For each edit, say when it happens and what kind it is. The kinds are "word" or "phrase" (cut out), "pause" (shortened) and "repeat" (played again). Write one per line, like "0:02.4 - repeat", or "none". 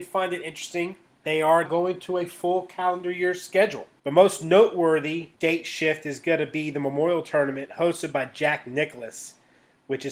0:01.2 - word
0:01.6 - word
0:05.3 - pause

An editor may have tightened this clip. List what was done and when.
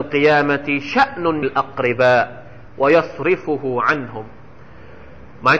0:01.4 - phrase

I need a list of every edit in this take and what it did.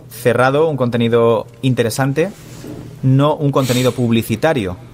none

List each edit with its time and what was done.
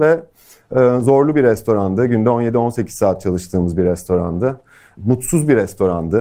none

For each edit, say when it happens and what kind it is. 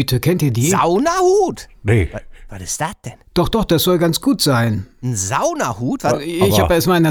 none

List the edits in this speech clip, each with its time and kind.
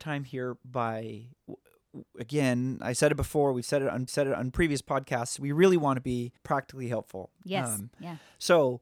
0:01.4 - word
0:04.1 - repeat
0:06.4 - pause

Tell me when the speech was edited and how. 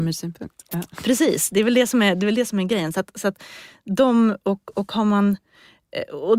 none

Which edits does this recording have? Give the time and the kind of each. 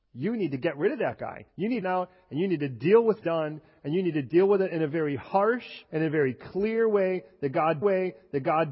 0:01.5 - pause
0:01.8 - phrase
0:03.2 - phrase
0:05.8 - pause
0:07.8 - repeat

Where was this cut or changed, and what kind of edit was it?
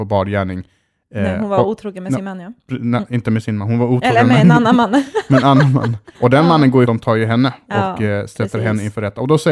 0:06.1 - pause
0:06.9 - phrase

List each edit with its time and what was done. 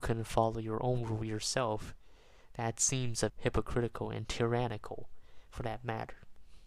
0:03.3 - word

